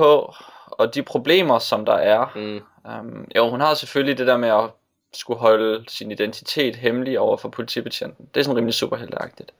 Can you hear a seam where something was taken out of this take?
no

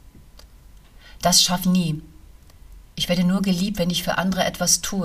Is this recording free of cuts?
no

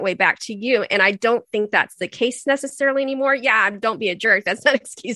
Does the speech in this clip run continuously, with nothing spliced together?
yes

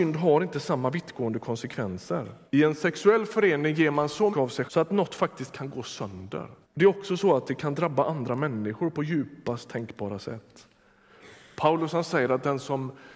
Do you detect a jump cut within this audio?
yes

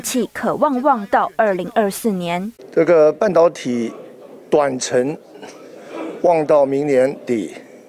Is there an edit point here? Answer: yes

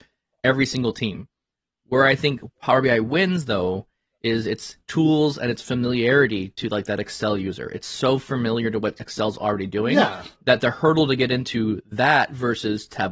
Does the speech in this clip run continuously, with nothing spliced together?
yes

